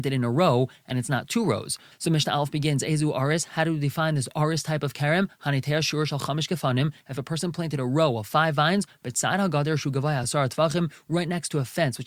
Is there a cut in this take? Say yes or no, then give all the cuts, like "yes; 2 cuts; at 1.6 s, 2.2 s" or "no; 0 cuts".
no; 0 cuts